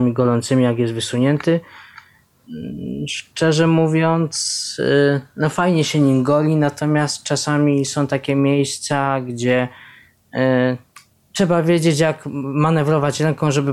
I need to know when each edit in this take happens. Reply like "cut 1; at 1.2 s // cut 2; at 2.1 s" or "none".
cut 1; at 11.1 s